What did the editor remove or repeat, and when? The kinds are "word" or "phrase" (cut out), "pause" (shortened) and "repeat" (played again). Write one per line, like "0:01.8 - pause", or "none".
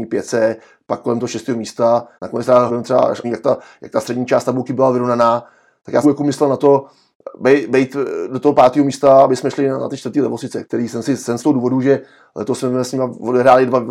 0:02.2 - pause
0:02.7 - phrase
0:03.2 - phrase
0:06.0 - phrase
0:10.6 - word
0:11.4 - phrase